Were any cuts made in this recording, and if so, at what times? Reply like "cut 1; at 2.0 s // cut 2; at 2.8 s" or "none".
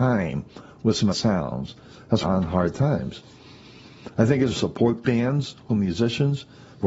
cut 1; at 1.1 s // cut 2; at 2.2 s // cut 3; at 4.5 s // cut 4; at 5.0 s // cut 5; at 5.7 s